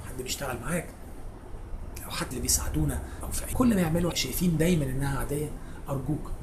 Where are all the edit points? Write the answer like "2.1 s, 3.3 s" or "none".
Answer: 2.3 s, 3.2 s, 3.5 s, 4.1 s